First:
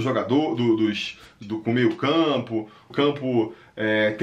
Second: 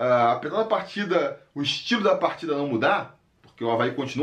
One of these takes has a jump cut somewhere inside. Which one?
first; 2 cuts; at 1.4 s, 2.9 s

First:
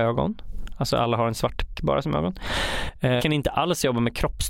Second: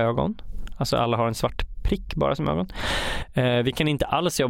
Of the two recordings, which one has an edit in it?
first; 2 cuts; at 1.7 s, 3.2 s

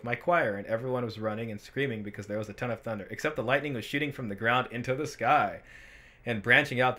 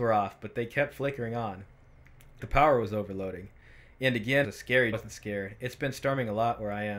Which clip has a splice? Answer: second; 3 cuts; at 2.4 s, 4.4 s, 4.9 s

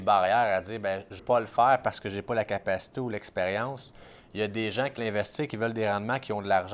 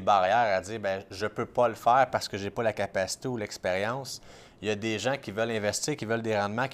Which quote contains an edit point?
first; 2 cuts; at 1.2 s, 5.0 s

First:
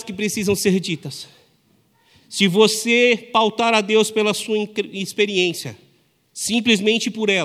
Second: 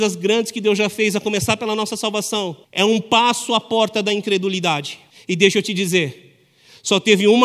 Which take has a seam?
second; 2 cuts; at 2.6 s, 5.1 s

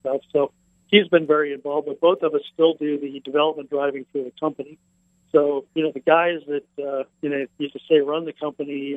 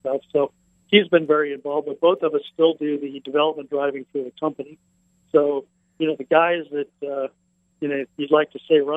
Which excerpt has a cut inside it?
first; 3 cuts; at 5.7 s, 7.1 s, 7.7 s

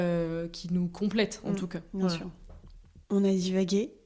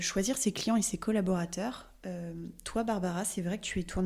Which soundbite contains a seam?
first; 1 cut; at 3.0 s

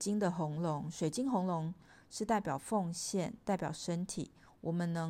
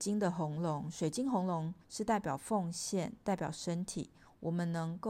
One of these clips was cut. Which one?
second; 1 cut; at 1.8 s

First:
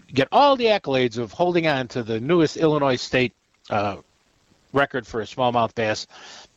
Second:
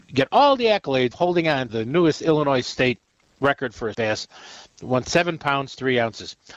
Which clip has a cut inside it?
second; 5 cuts; at 1.1 s, 1.7 s, 3.2 s, 3.9 s, 5.0 s

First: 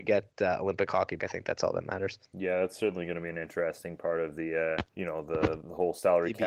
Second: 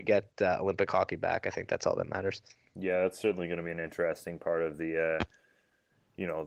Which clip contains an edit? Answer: first; 3 cuts; at 1.2 s, 2.3 s, 4.9 s

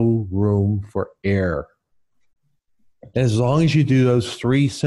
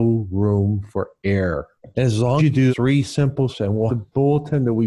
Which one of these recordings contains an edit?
second; 5 cuts; at 1.8 s, 2.4 s, 2.7 s, 3.5 s, 3.9 s

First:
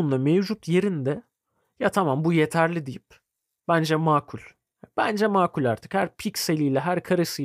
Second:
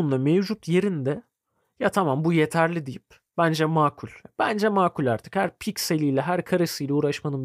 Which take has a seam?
second; 2 cuts; at 3.3 s, 4.2 s

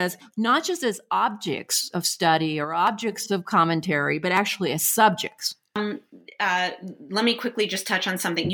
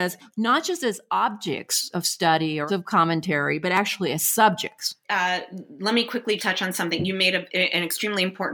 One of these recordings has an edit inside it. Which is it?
second; 3 cuts; at 2.7 s, 5.0 s, 6.4 s

